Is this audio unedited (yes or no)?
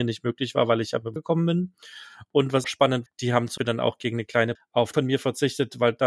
no